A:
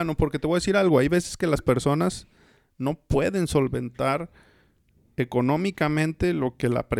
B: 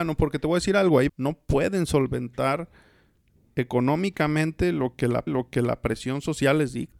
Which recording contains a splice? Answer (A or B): B